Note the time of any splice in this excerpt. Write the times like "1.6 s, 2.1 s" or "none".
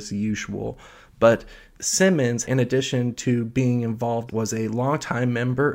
1.8 s, 2.4 s, 4.3 s